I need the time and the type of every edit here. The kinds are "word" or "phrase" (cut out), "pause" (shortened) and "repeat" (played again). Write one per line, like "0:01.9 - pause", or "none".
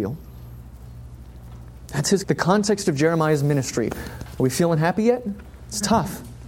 0:02.2 - word

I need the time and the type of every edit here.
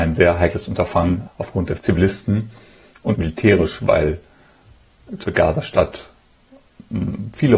0:01.3 - word
0:01.8 - word
0:03.1 - word
0:05.2 - word

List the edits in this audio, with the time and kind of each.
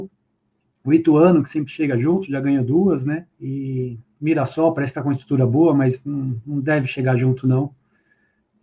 0:03.3 - pause

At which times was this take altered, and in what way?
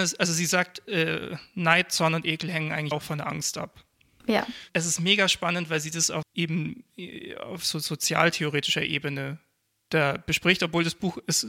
0:02.9 - word
0:06.2 - word

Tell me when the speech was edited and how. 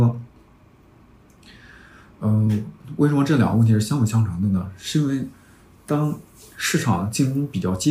none

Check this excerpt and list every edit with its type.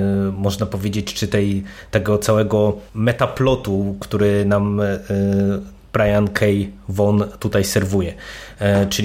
0:02.9 - pause

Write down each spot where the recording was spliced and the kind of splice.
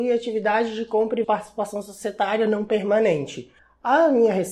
0:01.2 - phrase
0:03.6 - pause

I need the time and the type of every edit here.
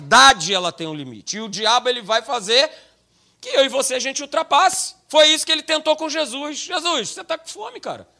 none

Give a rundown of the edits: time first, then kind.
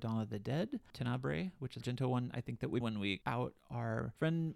0:01.8 - word
0:02.8 - word
0:03.2 - word

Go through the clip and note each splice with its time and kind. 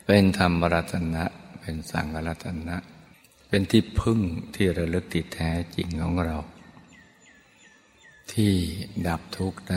0:03.1 - pause

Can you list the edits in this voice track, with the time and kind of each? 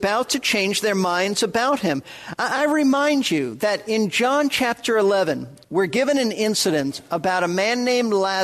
0:05.6 - pause

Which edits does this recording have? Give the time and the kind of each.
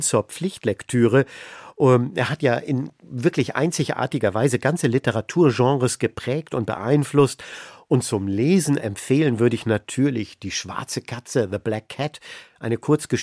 none

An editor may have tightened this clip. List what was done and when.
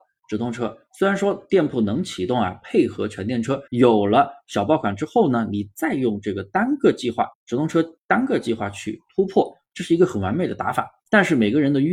0:03.7 - pause
0:07.3 - pause
0:11.0 - pause

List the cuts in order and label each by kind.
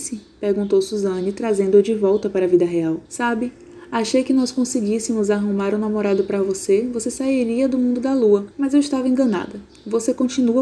0:03.0 - pause
0:08.5 - pause

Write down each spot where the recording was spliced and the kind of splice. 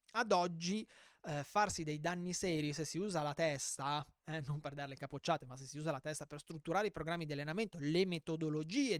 none

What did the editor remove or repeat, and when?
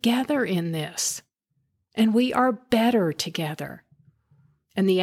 none

